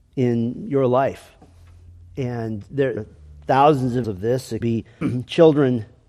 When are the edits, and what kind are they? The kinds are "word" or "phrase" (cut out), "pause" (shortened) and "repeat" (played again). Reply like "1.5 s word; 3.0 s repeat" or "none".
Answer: 3.0 s word; 4.0 s word; 4.6 s word; 5.0 s word